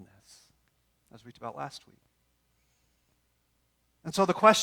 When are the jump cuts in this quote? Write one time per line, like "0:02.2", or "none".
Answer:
0:01.3